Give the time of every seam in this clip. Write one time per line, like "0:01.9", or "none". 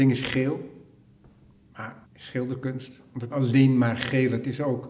0:02.0
0:03.3